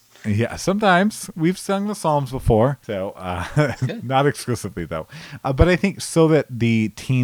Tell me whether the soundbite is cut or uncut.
cut